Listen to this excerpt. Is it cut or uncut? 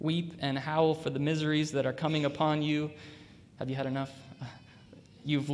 uncut